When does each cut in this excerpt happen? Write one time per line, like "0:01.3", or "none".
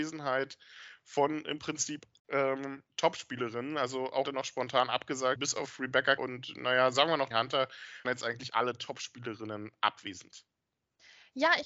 0:02.2
0:02.9
0:04.2
0:05.4
0:06.2
0:06.9
0:07.3
0:08.0